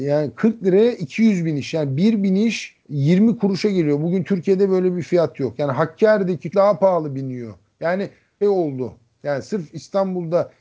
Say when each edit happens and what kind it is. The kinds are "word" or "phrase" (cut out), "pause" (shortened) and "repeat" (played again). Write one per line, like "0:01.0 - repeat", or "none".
0:02.8 - pause
0:06.5 - word
0:08.4 - phrase